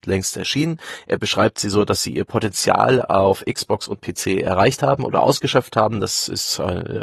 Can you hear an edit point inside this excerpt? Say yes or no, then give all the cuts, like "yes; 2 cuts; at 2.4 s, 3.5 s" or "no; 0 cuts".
no; 0 cuts